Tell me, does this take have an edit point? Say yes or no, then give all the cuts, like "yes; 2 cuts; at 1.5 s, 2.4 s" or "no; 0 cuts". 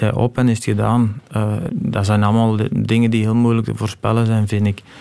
yes; 1 cut; at 1.7 s